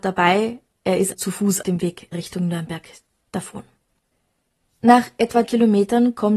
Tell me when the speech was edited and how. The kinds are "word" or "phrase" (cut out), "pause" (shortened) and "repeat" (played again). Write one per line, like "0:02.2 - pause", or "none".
0:01.1 - word
0:01.6 - word
0:02.1 - word
0:05.4 - word